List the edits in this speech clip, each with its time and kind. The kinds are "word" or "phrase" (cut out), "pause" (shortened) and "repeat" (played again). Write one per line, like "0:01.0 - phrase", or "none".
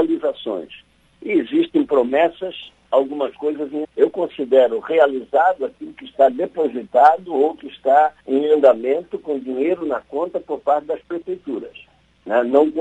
0:02.9 - word
0:03.8 - word
0:08.2 - pause